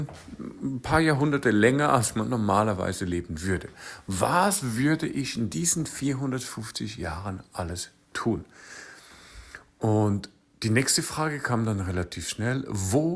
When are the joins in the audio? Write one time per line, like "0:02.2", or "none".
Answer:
none